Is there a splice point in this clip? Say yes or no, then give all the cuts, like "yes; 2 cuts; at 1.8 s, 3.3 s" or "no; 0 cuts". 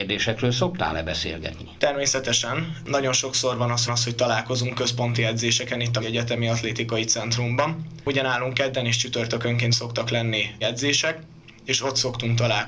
yes; 3 cuts; at 3.9 s, 6.0 s, 10.6 s